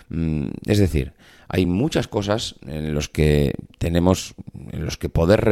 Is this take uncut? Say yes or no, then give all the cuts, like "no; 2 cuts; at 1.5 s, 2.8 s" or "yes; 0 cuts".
yes; 0 cuts